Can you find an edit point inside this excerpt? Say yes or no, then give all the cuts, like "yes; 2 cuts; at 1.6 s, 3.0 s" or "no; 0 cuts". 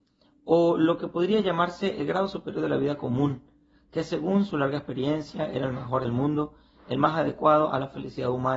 yes; 1 cut; at 6.0 s